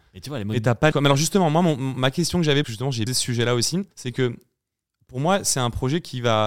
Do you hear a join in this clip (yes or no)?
yes